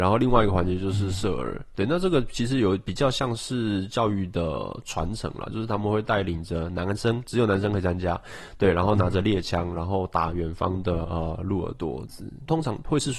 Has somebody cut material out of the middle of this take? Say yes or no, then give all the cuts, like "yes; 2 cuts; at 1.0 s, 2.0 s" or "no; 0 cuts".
no; 0 cuts